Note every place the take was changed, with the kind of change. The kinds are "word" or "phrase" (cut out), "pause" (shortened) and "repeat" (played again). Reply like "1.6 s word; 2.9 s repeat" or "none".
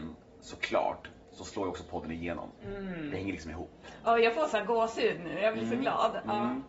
2.6 s pause